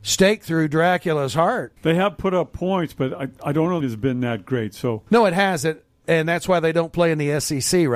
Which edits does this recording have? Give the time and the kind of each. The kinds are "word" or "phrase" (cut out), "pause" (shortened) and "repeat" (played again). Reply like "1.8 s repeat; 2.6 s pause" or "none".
1.8 s pause; 3.8 s phrase; 5.1 s pause